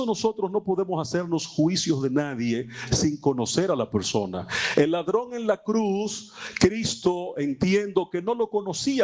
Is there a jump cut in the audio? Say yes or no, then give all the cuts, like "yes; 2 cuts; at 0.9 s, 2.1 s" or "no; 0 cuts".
no; 0 cuts